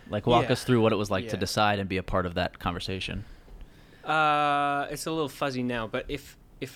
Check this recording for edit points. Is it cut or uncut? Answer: uncut